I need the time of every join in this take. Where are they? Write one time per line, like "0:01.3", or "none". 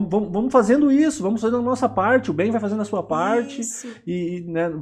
none

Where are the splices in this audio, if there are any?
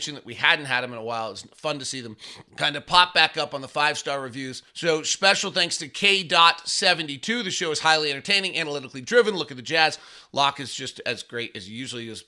0:02.5
0:04.7

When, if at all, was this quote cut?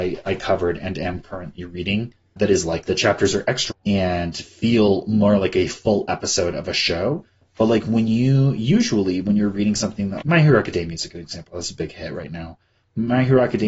0:02.4
0:02.9
0:03.7
0:10.2

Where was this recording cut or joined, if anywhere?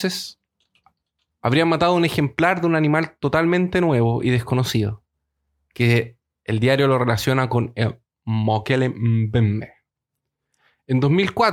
none

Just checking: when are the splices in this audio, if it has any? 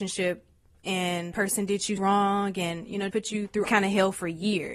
0:01.3
0:02.0
0:03.1
0:03.6

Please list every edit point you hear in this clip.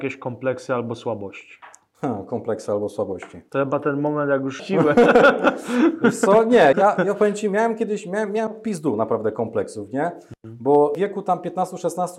0:04.6
0:06.7

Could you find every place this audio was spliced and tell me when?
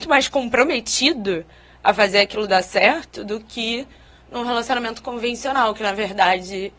none

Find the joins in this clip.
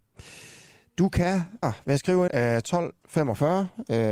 0:01.6
0:02.3

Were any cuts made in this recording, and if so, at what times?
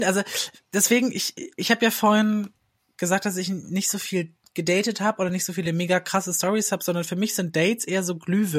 none

